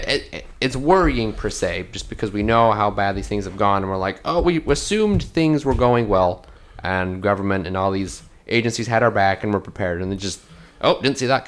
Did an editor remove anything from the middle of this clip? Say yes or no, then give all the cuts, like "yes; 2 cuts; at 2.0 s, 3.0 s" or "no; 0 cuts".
yes; 1 cut; at 4.4 s